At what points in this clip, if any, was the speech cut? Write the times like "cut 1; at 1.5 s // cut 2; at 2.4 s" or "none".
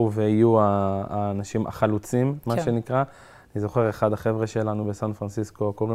none